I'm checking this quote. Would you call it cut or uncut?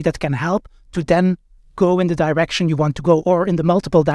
cut